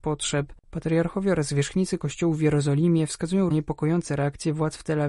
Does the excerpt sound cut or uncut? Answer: cut